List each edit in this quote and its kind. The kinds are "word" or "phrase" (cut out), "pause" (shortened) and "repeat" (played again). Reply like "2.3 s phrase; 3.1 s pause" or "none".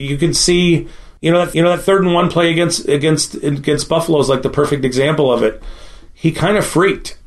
1.2 s pause; 1.5 s repeat